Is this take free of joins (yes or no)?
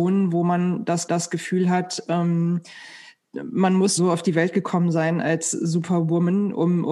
no